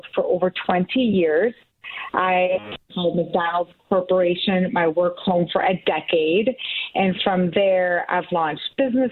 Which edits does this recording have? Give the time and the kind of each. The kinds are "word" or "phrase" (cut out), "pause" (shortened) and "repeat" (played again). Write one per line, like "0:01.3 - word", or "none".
0:02.8 - pause